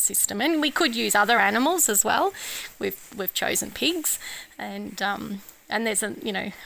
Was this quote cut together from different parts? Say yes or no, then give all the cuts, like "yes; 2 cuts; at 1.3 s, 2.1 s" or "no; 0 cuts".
no; 0 cuts